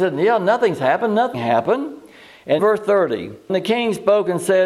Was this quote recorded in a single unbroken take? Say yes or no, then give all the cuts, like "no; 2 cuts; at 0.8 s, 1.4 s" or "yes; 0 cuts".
no; 3 cuts; at 1.3 s, 2.6 s, 3.5 s